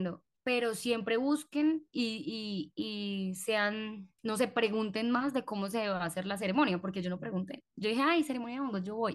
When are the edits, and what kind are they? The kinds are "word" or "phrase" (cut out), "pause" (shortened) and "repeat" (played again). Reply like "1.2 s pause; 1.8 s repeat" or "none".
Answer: 4.2 s pause